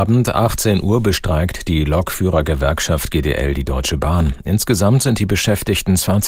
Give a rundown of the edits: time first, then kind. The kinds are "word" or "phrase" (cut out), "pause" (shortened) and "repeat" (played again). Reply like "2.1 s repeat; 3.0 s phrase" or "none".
none